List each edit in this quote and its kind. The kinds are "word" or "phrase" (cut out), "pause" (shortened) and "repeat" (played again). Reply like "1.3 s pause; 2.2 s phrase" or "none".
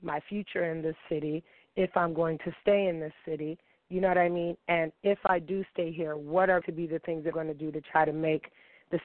6.6 s word; 7.3 s word